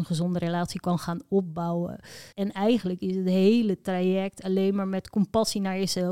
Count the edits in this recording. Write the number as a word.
one